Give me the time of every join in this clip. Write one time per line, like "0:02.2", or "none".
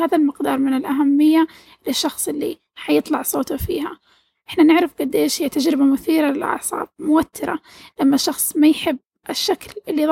none

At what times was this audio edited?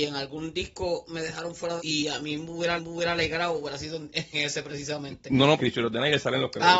0:01.8
0:02.8
0:04.3
0:05.6

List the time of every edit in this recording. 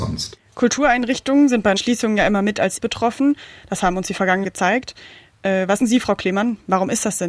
0:01.8
0:02.8
0:04.4
0:05.8

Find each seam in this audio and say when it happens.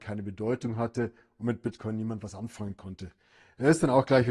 none

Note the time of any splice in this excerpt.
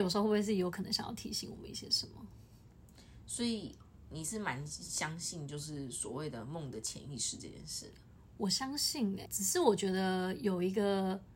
0:09.3

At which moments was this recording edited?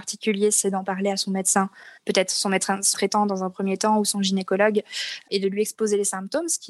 0:02.0
0:02.9

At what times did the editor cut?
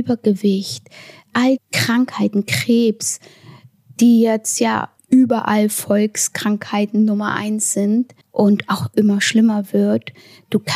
0:01.6
0:05.0
0:08.2

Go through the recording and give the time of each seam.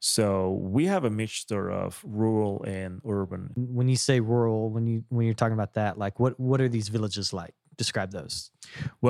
none

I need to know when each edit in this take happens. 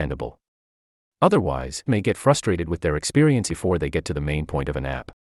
0:01.9
0:03.5

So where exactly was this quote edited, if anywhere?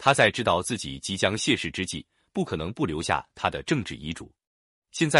none

